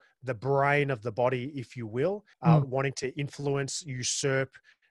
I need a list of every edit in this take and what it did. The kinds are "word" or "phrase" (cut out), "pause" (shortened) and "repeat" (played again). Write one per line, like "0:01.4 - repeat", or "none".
0:02.3 - pause

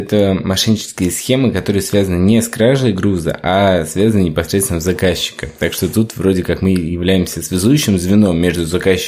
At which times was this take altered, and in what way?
none

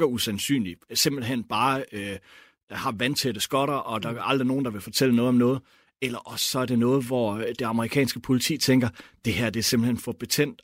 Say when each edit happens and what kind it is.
none

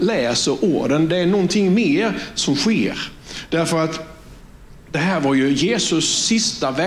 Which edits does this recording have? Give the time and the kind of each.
none

